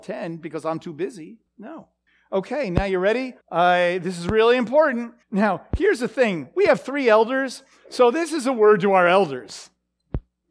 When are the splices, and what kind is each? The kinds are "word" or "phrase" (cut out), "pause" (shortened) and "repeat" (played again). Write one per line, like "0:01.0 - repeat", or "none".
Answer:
0:01.5 - pause
0:03.4 - pause
0:05.2 - pause